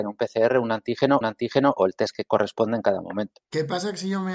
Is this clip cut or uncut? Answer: cut